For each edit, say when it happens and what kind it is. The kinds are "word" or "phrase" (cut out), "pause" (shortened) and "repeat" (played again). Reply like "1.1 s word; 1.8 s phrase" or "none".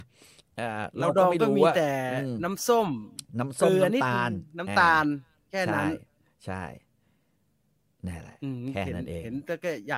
none